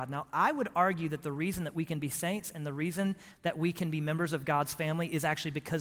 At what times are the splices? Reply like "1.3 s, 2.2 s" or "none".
none